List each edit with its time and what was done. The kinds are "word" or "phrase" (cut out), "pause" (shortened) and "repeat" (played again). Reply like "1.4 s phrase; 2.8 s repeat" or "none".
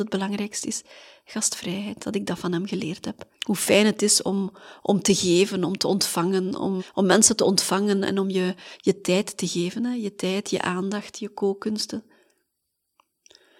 3.3 s pause; 6.8 s word